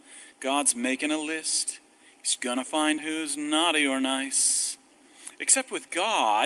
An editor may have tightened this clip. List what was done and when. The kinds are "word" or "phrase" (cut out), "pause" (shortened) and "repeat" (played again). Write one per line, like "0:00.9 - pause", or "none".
0:02.4 - phrase
0:03.0 - word